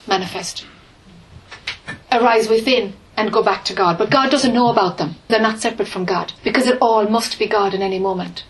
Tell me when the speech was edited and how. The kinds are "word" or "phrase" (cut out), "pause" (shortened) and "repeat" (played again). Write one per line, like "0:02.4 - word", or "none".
0:02.0 - pause
0:05.3 - word
0:06.4 - pause